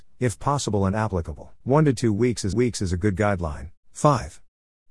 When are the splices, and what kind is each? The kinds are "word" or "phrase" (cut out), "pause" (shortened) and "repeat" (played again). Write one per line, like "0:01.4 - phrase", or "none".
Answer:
0:01.6 - pause
0:02.5 - repeat
0:03.8 - pause

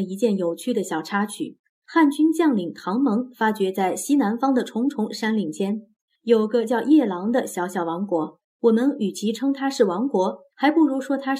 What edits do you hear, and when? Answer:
0:08.5 - pause

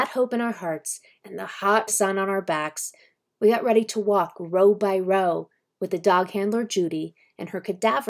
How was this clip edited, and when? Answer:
0:01.9 - word

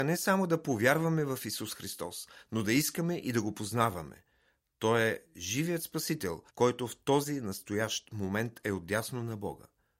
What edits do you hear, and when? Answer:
0:06.5 - pause

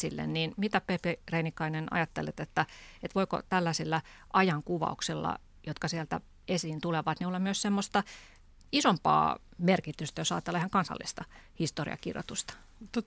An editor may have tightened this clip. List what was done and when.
none

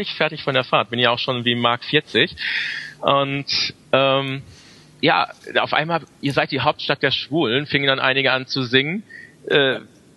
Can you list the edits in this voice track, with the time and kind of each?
none

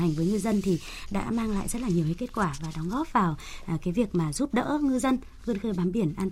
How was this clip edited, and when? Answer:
none

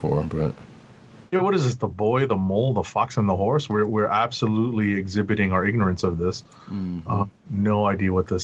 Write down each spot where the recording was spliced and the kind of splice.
0:03.9 - word
0:07.4 - word

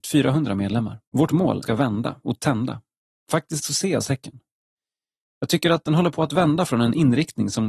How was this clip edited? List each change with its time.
0:01.1 - pause
0:01.6 - phrase
0:03.0 - pause
0:04.0 - word

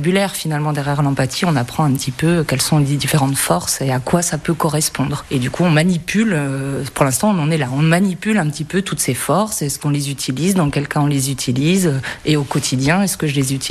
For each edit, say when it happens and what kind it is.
none

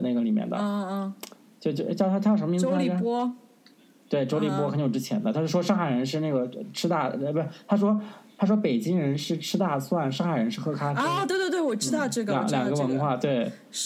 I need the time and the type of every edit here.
none

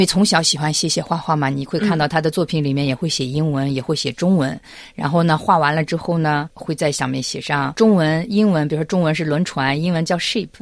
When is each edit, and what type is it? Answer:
none

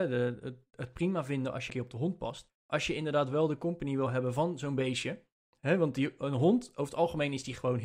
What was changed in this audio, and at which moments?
0:01.7 - word
0:02.6 - pause

